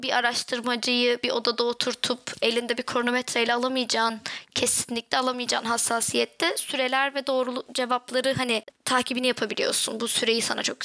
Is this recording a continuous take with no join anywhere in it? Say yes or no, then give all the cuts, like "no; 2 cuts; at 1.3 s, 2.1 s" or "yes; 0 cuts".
yes; 0 cuts